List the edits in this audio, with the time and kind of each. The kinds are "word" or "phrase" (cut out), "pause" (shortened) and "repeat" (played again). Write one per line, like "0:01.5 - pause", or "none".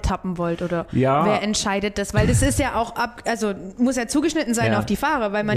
none